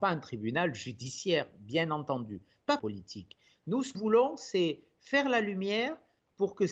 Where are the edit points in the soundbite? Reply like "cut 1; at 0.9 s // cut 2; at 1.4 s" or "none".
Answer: cut 1; at 2.8 s // cut 2; at 3.9 s